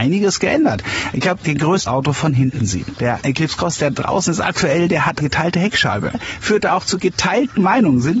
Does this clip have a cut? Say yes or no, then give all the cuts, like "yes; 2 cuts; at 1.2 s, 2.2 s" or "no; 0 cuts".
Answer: yes; 2 cuts; at 1.9 s, 5.2 s